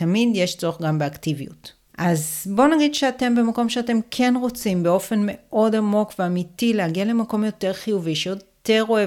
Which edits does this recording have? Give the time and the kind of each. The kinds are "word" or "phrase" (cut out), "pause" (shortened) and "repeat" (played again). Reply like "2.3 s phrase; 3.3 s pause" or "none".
1.9 s pause